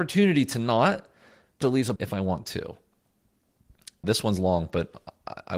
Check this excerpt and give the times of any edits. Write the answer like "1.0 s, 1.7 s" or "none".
1.6 s, 2.0 s, 4.0 s